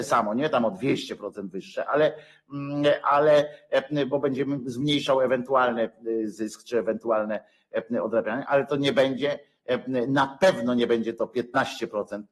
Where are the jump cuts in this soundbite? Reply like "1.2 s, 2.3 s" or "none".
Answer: none